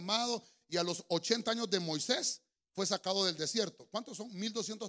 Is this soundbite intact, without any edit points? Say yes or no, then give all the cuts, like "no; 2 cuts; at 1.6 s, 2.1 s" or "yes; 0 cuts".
yes; 0 cuts